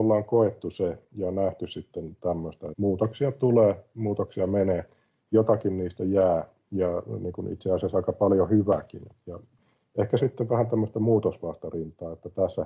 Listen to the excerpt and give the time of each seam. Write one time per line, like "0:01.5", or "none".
0:02.7
0:10.2